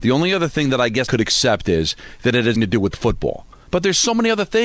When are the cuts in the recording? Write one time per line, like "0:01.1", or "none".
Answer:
0:01.1
0:02.5